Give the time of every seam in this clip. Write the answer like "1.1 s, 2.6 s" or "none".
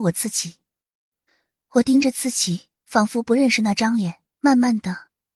2.8 s, 4.3 s